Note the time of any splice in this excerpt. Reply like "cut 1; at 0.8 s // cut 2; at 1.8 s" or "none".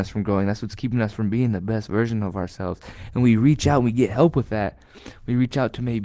none